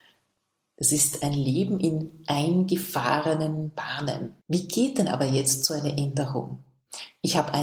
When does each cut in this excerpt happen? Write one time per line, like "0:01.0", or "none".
0:04.4